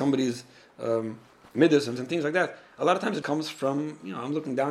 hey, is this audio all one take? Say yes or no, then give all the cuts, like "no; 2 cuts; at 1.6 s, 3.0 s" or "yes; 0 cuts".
no; 2 cuts; at 2.0 s, 3.2 s